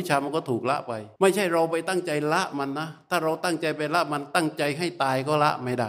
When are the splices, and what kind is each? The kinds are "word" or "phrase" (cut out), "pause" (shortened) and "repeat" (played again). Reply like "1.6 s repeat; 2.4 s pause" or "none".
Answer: 1.2 s pause